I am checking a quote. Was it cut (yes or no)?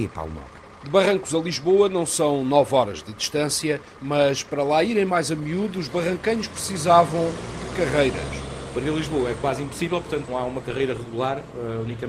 yes